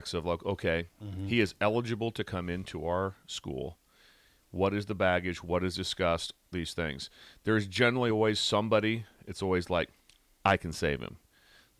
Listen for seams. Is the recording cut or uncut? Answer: uncut